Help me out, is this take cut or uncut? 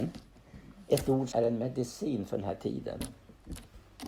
cut